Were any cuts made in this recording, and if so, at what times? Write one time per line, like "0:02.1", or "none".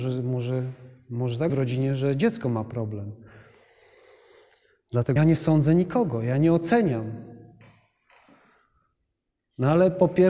0:01.5
0:05.2

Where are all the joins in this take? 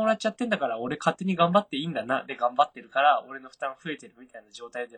none

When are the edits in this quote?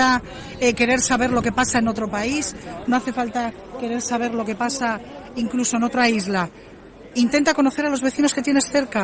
none

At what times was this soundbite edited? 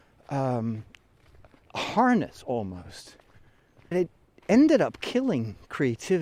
0:03.9

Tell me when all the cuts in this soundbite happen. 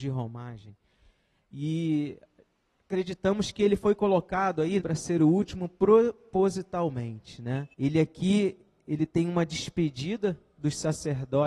0:04.8
0:07.7

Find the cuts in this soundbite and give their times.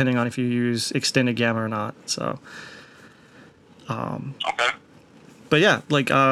none

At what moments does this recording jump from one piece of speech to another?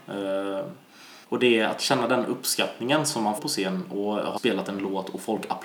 0:01.2
0:03.4
0:04.4

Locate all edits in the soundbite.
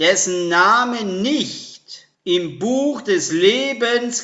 0:02.1

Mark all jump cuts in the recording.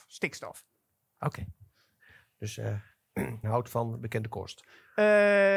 0:03.4

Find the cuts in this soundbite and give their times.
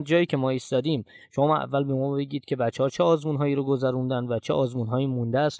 none

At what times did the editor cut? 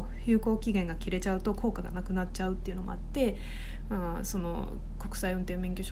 none

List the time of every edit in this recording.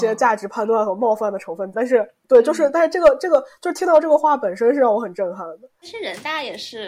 0:01.7
0:02.2

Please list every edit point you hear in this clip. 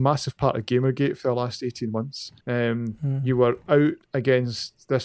0:02.4

